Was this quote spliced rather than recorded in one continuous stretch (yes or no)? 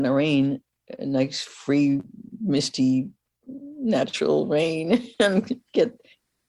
no